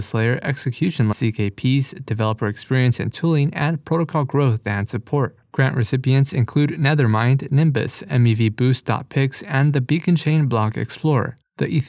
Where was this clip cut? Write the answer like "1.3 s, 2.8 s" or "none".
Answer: 1.1 s